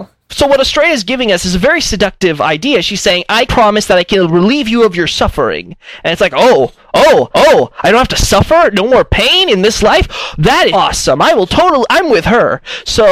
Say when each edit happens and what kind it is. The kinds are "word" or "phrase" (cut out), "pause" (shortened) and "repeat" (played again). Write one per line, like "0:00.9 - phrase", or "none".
0:03.5 - word
0:07.3 - repeat
0:10.7 - word